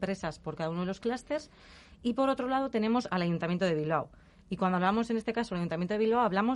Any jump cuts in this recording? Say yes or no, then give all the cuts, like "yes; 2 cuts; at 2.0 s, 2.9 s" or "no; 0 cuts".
no; 0 cuts